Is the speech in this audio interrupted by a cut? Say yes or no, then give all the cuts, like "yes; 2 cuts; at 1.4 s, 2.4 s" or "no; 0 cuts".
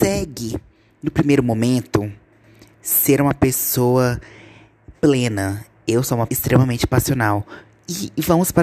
yes; 1 cut; at 6.3 s